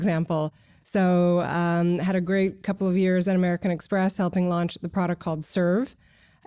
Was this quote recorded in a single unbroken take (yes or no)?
yes